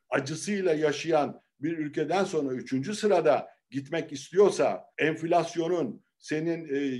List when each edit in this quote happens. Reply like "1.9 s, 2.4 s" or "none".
4.9 s

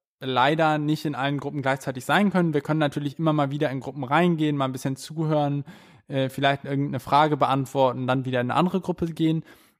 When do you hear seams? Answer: none

